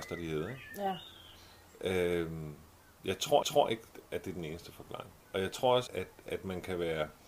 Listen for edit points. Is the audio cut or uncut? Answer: cut